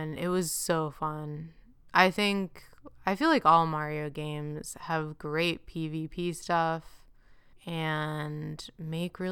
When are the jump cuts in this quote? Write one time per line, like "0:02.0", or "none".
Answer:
0:07.5